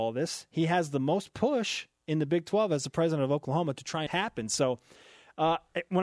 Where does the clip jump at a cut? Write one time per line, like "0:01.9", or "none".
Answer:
0:04.1

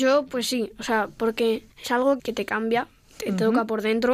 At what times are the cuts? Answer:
0:01.7
0:02.2

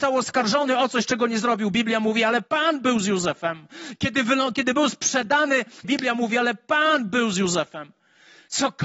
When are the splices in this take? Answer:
0:05.8

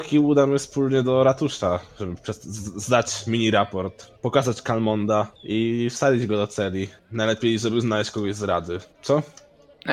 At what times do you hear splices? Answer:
0:04.2
0:05.4
0:07.0
0:08.9

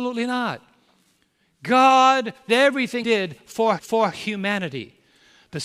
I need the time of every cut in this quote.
0:02.5
0:03.0
0:03.8

